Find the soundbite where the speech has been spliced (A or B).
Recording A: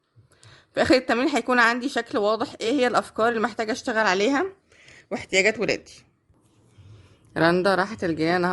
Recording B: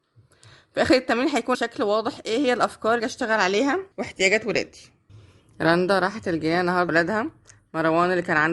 B